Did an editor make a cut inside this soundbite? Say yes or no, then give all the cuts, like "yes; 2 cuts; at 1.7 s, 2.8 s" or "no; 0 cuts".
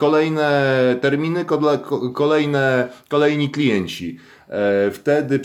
no; 0 cuts